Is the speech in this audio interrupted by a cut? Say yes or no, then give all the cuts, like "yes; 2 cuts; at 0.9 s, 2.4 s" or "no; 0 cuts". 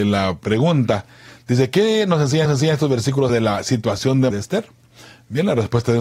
yes; 3 cuts; at 2.4 s, 3.3 s, 4.3 s